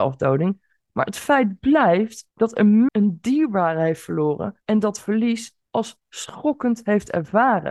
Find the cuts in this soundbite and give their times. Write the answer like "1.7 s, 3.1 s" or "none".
2.3 s, 2.9 s, 4.6 s, 5.7 s